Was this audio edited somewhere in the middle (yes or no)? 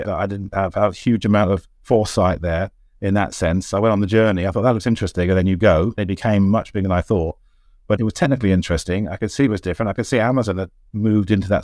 no